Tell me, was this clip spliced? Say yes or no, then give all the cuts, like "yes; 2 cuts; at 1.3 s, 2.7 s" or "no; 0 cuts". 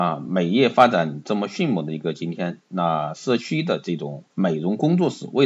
yes; 1 cut; at 4.3 s